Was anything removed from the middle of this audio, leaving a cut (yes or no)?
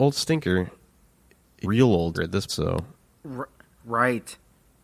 yes